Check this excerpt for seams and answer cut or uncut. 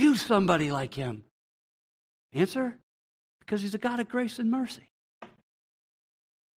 uncut